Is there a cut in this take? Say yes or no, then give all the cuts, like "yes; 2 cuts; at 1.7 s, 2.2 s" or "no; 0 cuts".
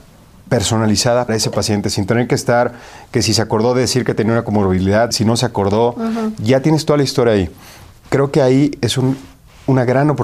yes; 2 cuts; at 1.3 s, 5.1 s